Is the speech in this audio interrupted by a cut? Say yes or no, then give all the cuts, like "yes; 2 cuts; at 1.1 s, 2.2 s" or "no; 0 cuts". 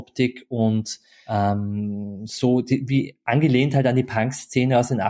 no; 0 cuts